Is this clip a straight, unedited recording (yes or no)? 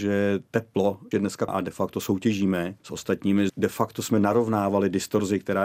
no